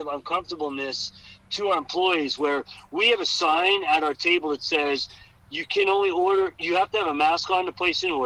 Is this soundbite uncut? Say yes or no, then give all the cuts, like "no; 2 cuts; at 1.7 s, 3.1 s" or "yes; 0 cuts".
yes; 0 cuts